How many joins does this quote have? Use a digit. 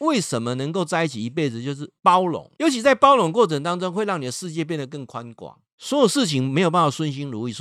3